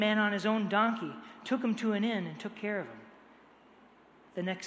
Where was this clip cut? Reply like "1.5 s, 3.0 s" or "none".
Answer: none